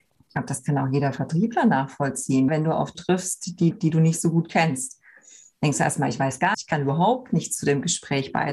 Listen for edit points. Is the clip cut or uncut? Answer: cut